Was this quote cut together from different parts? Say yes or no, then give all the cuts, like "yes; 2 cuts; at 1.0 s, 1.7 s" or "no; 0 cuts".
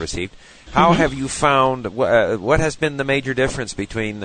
no; 0 cuts